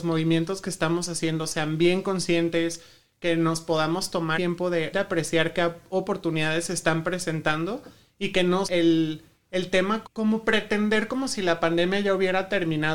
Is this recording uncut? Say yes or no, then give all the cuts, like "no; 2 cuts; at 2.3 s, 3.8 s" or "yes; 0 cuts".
no; 4 cuts; at 4.3 s, 4.9 s, 8.6 s, 10.0 s